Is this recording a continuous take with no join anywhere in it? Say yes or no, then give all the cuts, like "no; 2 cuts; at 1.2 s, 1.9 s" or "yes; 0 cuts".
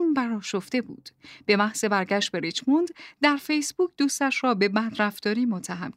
yes; 0 cuts